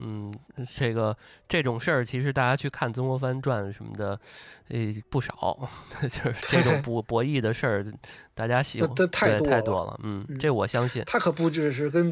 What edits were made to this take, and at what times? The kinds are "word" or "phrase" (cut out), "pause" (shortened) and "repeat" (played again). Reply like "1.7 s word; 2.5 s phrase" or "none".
none